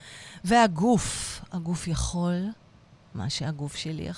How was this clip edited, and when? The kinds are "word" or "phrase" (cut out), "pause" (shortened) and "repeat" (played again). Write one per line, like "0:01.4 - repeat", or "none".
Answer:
none